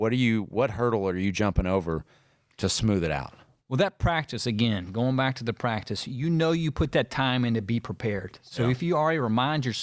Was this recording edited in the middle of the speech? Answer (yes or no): no